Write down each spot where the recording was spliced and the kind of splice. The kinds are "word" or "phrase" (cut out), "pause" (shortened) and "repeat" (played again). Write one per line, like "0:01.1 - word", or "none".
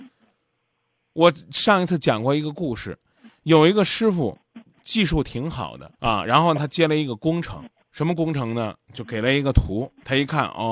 0:05.9 - pause
0:07.8 - pause